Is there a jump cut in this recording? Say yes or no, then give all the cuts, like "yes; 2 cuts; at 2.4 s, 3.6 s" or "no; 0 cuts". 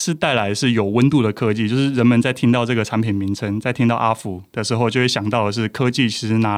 no; 0 cuts